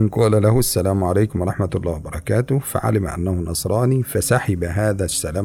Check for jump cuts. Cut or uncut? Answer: uncut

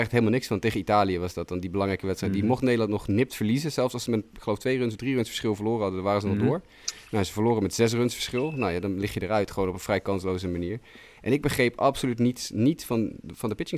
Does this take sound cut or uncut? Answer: uncut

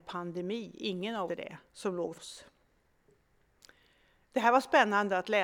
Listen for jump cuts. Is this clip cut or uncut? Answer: cut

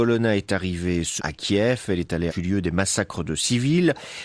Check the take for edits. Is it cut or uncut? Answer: cut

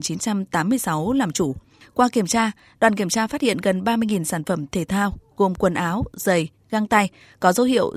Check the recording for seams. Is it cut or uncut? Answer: uncut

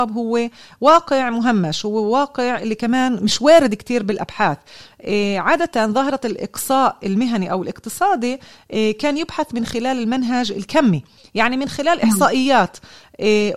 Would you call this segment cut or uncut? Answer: uncut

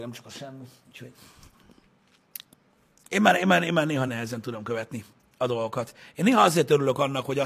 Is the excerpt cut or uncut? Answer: uncut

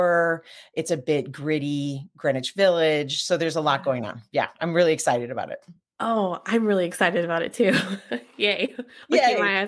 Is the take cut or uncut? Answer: uncut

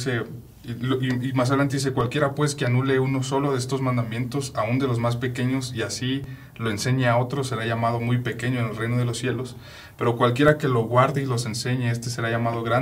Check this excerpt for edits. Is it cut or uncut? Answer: uncut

